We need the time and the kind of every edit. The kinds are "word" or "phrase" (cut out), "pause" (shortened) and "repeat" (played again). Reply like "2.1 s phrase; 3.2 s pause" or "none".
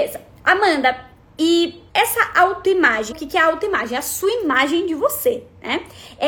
1.9 s pause; 3.1 s word